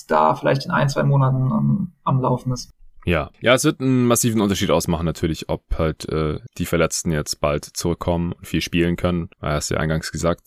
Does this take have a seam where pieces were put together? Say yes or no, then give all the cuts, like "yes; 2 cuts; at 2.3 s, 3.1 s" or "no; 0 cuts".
no; 0 cuts